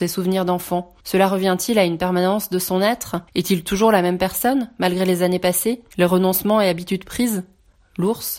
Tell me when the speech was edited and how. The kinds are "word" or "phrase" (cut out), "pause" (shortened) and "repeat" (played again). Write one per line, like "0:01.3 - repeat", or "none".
0:01.0 - pause
0:03.3 - pause
0:05.9 - pause